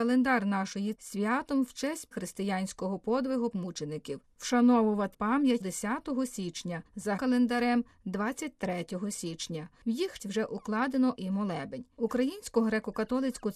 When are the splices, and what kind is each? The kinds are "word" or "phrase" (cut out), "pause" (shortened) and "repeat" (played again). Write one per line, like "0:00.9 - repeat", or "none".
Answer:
0:00.9 - word
0:02.1 - word
0:03.5 - word
0:05.1 - word
0:05.6 - word
0:07.2 - word
0:10.2 - word
0:11.1 - word

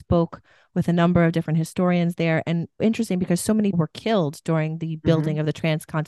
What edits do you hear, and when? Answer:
0:02.8 - word
0:03.7 - word

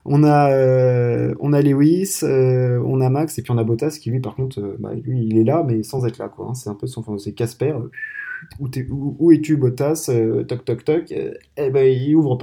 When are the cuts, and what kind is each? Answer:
none

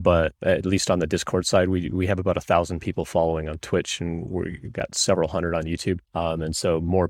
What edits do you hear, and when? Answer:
0:06.0 - pause

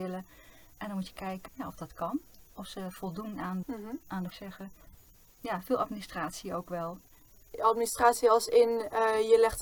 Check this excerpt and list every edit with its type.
0:01.5 - word
0:03.6 - phrase
0:04.3 - phrase

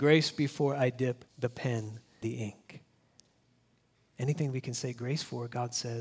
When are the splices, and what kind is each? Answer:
0:01.3 - pause
0:02.2 - word

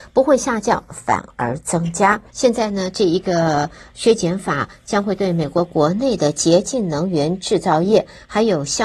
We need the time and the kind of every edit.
0:02.3 - pause

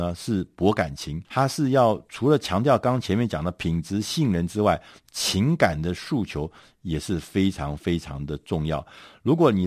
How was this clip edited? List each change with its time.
0:01.2 - pause

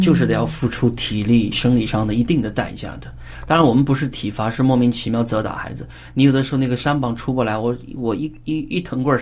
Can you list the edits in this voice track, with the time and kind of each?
0:01.5 - phrase

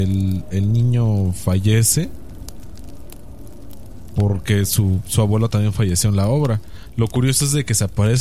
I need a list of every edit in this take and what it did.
none

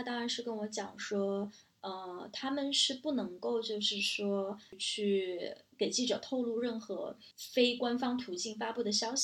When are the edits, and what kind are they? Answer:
0:07.3 - pause

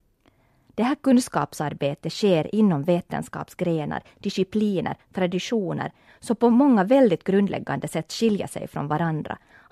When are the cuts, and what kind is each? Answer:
none

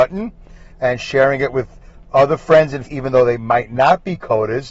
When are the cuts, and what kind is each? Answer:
0:02.9 - word

